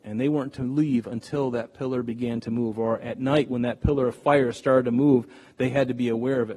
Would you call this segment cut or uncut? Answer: uncut